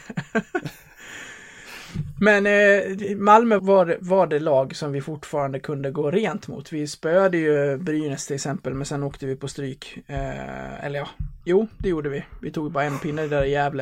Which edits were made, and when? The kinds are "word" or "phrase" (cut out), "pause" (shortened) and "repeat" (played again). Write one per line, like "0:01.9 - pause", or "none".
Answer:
0:03.6 - word
0:11.4 - pause